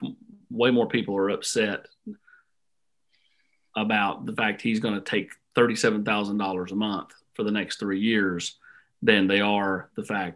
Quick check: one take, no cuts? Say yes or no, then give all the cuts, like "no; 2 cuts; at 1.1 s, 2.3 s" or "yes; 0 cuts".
yes; 0 cuts